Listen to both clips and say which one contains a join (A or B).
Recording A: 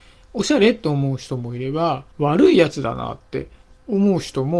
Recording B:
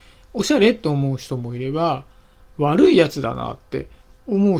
A